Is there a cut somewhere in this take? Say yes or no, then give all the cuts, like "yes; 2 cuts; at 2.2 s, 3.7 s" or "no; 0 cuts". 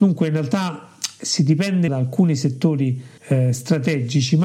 yes; 2 cuts; at 1.9 s, 3.2 s